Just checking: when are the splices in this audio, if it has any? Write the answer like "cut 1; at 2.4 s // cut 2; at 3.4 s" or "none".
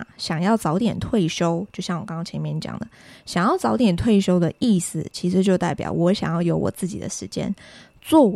none